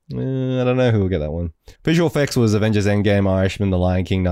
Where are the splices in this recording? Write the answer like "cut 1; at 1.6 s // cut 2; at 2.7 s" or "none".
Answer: cut 1; at 1.8 s